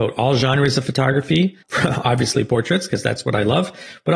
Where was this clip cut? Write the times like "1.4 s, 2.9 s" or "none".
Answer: 1.6 s